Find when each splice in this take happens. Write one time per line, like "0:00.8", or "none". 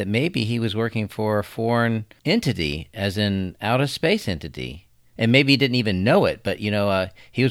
none

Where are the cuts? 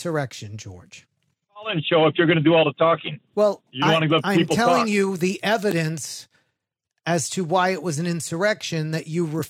0:03.3

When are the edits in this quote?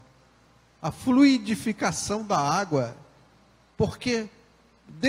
none

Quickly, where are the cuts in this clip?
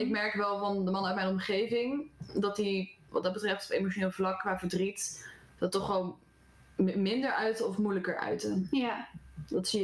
none

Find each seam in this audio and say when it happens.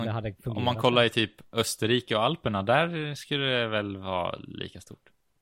none

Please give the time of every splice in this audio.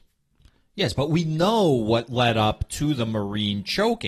none

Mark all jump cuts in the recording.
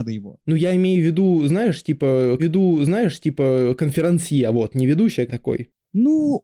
0:02.4
0:05.3

